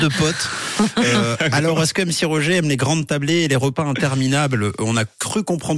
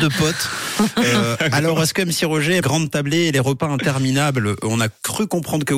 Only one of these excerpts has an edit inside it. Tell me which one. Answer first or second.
second